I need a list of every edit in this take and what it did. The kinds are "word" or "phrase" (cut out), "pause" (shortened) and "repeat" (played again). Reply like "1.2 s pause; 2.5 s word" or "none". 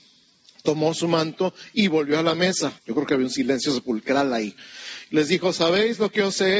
2.8 s pause